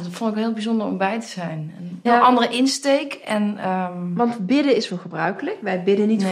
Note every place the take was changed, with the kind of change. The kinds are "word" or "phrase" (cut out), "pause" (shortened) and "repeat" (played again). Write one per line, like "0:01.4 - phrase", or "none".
0:02.1 - word
0:04.9 - phrase